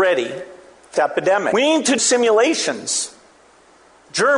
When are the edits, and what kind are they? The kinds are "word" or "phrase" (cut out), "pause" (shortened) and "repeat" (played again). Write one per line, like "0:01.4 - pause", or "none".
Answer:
0:00.9 - phrase
0:02.0 - word